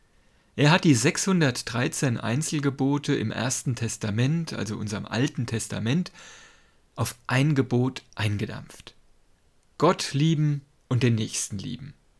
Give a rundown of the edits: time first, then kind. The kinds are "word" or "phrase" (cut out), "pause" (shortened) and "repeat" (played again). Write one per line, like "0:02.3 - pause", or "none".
none